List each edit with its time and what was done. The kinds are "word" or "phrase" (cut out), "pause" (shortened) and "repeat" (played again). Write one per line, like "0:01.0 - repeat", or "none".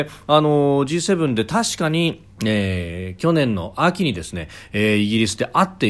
0:02.3 - pause